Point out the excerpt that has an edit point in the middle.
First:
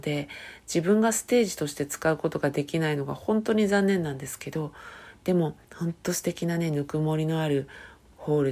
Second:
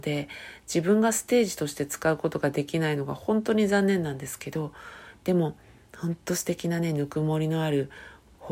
first; 1 cut; at 5.6 s

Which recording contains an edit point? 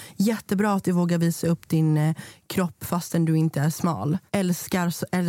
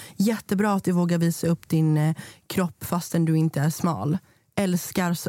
first; 1 cut; at 4.3 s

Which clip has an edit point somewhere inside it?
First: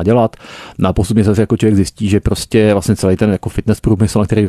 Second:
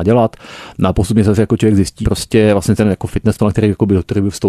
second; 3 cuts; at 2.0 s, 2.8 s, 3.4 s

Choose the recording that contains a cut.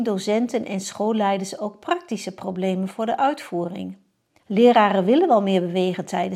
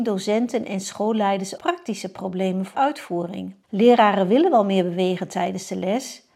second; 3 cuts; at 1.6 s, 2.7 s, 3.6 s

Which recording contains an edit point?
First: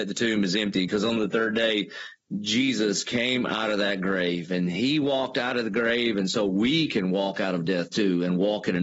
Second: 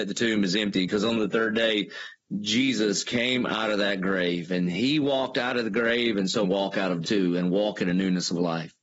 second; 2 cuts; at 6.4 s, 7.0 s

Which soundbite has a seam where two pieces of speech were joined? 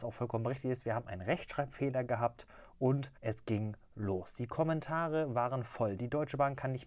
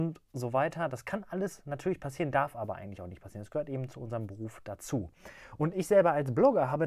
first; 1 cut; at 3.2 s

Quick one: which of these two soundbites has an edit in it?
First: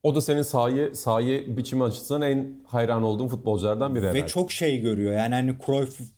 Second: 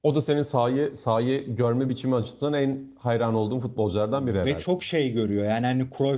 first; 1 cut; at 1.6 s

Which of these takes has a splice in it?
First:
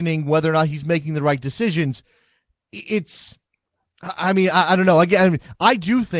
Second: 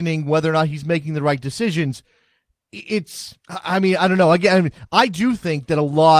second; 2 cuts; at 3.4 s, 4.0 s

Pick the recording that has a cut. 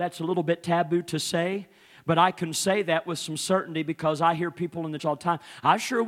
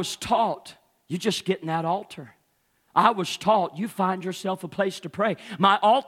first; 1 cut; at 5.0 s

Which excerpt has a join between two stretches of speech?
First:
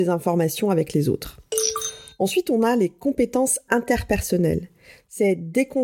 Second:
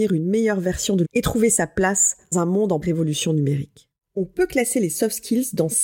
second; 3 cuts; at 1.0 s, 2.3 s, 2.8 s

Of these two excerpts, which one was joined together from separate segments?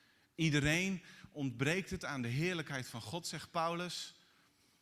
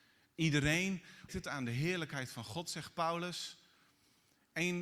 second; 1 cut; at 1.3 s

